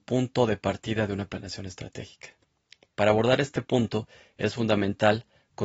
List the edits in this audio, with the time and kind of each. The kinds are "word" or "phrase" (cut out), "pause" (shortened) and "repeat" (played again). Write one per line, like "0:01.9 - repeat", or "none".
0:02.6 - pause